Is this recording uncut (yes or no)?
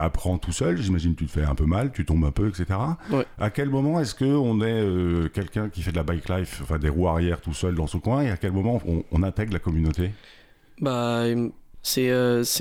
yes